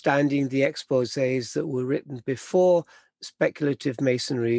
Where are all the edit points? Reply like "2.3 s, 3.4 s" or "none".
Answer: none